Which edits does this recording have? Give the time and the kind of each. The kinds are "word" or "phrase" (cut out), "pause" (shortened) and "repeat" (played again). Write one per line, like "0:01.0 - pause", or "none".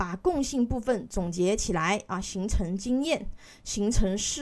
none